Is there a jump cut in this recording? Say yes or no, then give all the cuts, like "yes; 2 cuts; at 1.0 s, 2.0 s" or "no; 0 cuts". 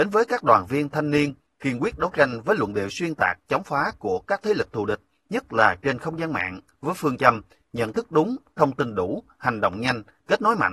no; 0 cuts